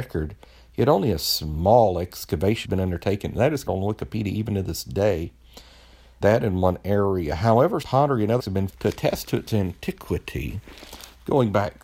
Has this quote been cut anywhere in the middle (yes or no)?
yes